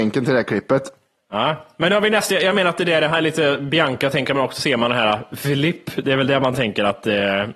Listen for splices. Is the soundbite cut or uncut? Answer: cut